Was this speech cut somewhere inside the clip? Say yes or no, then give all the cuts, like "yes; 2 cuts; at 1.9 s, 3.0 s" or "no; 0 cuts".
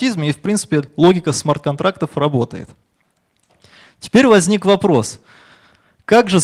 no; 0 cuts